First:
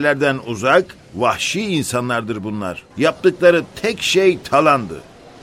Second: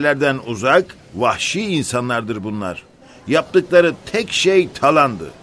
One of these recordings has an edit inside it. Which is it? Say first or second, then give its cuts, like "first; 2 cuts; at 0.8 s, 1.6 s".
first; 1 cut; at 2.9 s